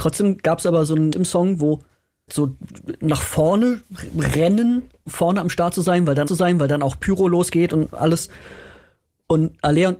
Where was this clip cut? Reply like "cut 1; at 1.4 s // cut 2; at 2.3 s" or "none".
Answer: cut 1; at 1.1 s // cut 2; at 2.3 s // cut 3; at 5.1 s // cut 4; at 6.3 s